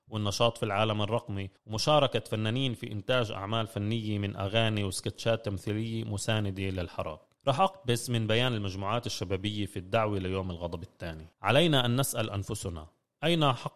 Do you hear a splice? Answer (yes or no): yes